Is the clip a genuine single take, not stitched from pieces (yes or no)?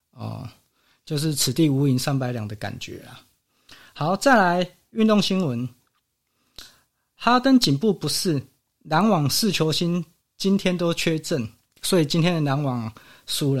yes